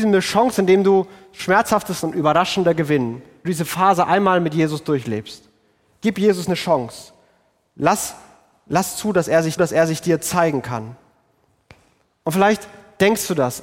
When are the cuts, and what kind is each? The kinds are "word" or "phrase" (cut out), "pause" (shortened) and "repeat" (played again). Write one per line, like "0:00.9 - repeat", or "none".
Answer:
0:02.0 - word
0:03.4 - word
0:09.6 - repeat